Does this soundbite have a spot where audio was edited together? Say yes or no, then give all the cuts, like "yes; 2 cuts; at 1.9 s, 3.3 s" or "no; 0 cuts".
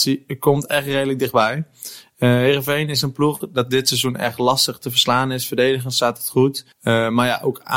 yes; 1 cut; at 6.7 s